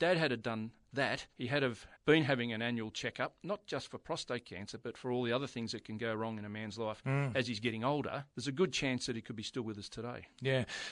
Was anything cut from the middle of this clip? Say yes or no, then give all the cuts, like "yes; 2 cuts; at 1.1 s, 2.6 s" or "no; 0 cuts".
yes; 3 cuts; at 1.3 s, 1.9 s, 8.3 s